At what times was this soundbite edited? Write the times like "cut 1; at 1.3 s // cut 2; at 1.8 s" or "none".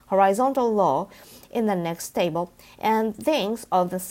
none